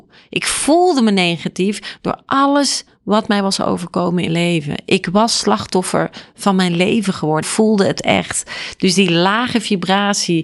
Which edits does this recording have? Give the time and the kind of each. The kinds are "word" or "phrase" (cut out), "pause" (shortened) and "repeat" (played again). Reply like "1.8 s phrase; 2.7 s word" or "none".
4.3 s word; 7.4 s phrase